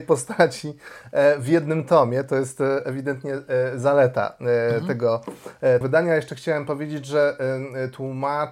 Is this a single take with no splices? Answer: no; 1 cut; at 5.8 s

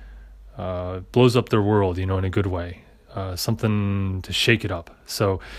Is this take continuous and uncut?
yes; 0 cuts

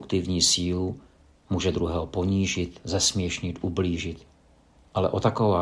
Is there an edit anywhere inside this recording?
no; 0 cuts

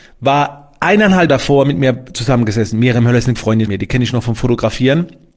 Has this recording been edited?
yes; 3 cuts; at 1.3 s, 3.4 s, 3.7 s

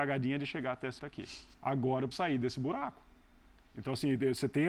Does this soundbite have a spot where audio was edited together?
yes; 3 cuts; at 1.0 s, 1.5 s, 2.1 s

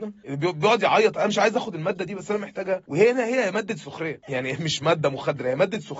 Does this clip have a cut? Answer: no; 0 cuts

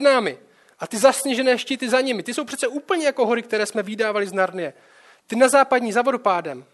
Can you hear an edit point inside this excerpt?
no; 0 cuts

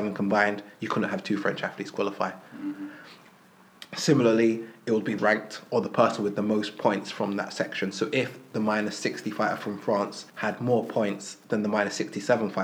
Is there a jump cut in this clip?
yes; 2 cuts; at 5.2 s, 10.3 s

